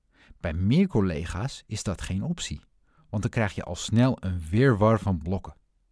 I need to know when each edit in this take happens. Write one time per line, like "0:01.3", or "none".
none